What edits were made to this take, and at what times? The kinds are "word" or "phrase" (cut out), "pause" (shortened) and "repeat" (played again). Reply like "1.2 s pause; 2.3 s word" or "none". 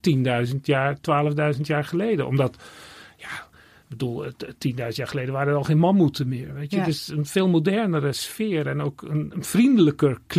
none

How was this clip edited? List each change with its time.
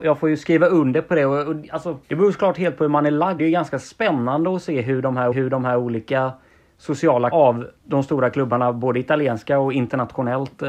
2.0 s pause; 3.4 s word; 5.3 s repeat; 7.3 s word; 7.8 s pause

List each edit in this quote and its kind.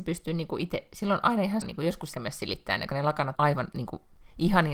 1.6 s word; 2.1 s word; 2.9 s word; 3.4 s word

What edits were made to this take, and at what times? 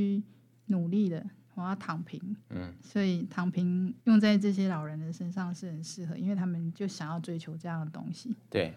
2.4 s pause; 4.0 s pause

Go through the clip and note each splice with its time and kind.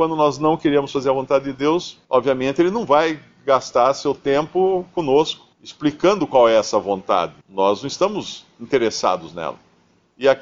2.0 s pause; 5.5 s pause; 7.4 s pause

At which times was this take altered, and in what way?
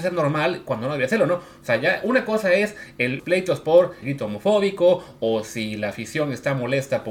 3.2 s word; 4.0 s word

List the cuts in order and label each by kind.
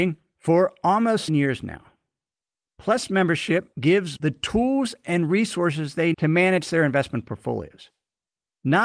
1.3 s word; 4.2 s word; 6.1 s word

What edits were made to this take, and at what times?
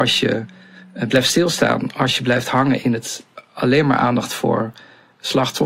none

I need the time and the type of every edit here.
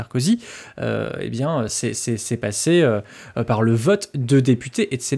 none

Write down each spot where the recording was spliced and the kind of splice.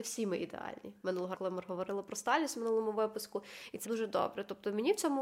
1.3 s word; 3.8 s word

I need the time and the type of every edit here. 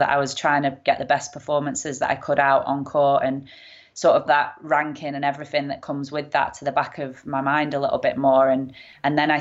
4.3 s word

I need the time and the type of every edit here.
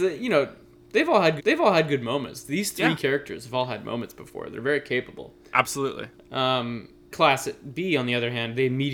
1.4 s repeat; 7.1 s word

